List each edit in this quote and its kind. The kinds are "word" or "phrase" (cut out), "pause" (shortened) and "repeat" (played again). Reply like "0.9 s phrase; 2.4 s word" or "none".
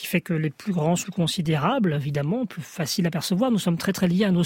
1.0 s word